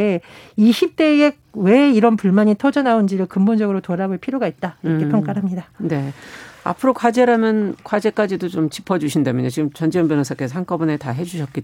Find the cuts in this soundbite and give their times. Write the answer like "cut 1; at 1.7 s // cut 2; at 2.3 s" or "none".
none